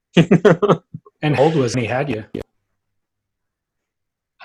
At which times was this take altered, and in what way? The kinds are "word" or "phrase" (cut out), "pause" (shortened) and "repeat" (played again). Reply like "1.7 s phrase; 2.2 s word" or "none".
1.4 s word; 1.7 s phrase